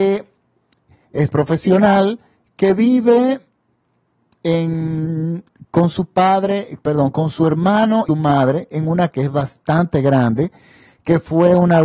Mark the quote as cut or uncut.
cut